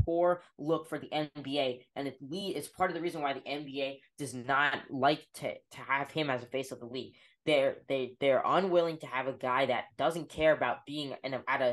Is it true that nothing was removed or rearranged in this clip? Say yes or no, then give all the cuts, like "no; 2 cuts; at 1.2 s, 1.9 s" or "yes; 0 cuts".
yes; 0 cuts